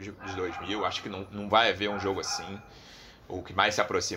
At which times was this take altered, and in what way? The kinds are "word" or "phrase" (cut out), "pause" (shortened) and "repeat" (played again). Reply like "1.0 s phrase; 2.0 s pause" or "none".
none